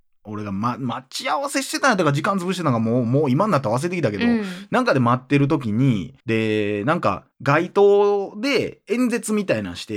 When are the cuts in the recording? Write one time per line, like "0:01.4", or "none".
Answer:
0:06.2
0:07.3